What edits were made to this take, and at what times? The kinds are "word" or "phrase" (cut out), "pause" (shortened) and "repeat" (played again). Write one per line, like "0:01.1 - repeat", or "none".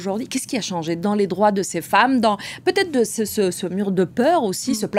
none